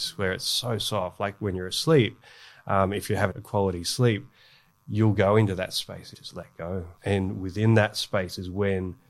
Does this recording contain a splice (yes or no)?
yes